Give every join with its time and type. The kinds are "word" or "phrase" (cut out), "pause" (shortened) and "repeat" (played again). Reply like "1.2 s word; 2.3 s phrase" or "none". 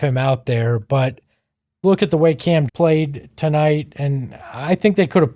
1.8 s word; 2.7 s word